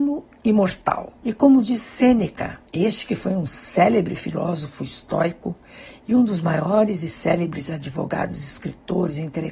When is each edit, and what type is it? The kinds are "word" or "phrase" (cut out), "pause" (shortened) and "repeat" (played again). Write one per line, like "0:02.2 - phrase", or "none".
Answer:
0:01.2 - pause
0:02.7 - pause

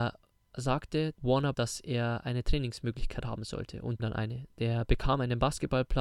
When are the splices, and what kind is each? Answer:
0:01.2 - word
0:01.5 - word
0:04.0 - phrase

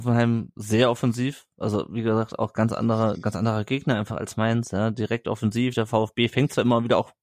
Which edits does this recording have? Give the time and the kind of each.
none

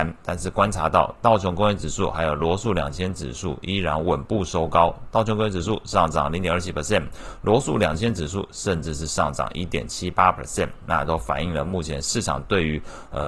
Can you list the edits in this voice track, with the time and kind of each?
none

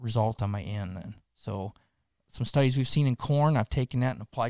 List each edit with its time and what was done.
0:01.2 - pause

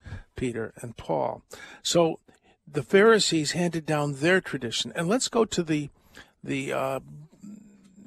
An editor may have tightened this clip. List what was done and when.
none

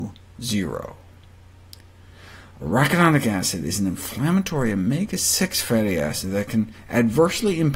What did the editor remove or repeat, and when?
none

